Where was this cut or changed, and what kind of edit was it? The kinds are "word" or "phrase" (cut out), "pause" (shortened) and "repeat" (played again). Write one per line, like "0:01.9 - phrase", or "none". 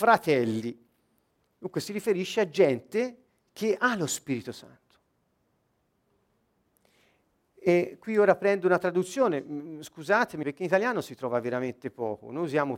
0:10.4 - phrase